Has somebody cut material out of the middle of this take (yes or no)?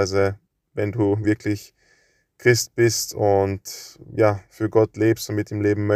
no